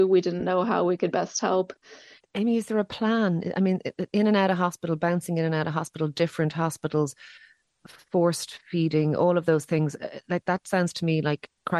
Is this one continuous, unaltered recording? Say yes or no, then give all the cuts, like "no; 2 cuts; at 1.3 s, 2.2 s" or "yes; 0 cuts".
yes; 0 cuts